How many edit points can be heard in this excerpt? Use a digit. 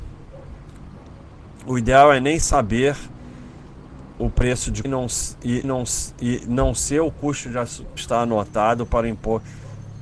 3